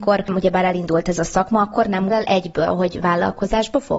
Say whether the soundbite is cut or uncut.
cut